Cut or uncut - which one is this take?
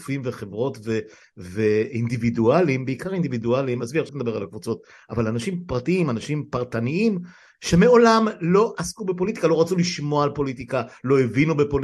cut